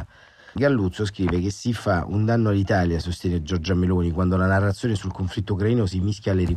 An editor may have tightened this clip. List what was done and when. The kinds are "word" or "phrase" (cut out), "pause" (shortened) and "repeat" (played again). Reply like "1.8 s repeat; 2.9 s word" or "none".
none